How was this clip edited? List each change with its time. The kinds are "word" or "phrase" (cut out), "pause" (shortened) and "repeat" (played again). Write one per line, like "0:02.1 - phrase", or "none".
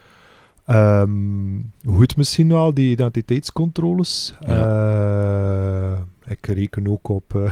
none